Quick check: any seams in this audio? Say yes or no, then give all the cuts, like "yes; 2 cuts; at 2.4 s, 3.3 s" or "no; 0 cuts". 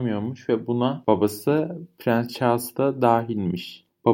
no; 0 cuts